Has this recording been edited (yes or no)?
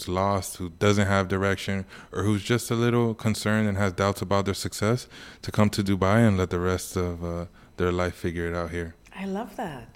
no